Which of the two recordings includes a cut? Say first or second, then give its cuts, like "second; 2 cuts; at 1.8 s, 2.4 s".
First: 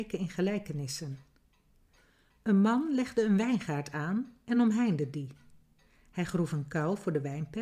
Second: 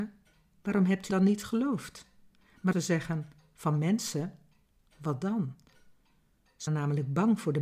second; 3 cuts; at 1.1 s, 2.7 s, 6.7 s